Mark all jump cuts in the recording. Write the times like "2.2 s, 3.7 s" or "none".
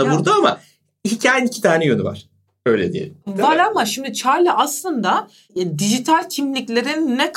none